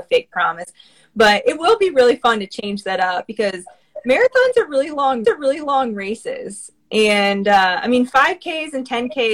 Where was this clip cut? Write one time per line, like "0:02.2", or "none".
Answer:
0:05.2